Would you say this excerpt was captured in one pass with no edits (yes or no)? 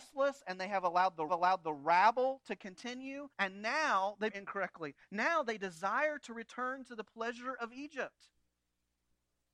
no